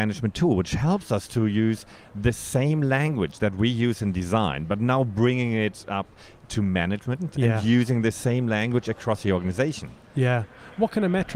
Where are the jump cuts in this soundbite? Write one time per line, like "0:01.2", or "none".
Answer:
none